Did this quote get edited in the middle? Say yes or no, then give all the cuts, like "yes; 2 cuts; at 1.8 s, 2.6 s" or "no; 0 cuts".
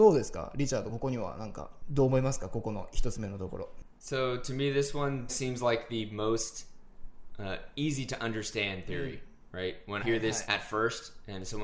yes; 3 cuts; at 5.3 s, 10.0 s, 10.5 s